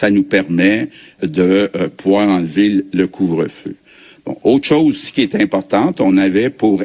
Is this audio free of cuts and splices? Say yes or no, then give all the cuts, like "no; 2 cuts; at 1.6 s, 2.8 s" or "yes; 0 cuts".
no; 1 cut; at 1.2 s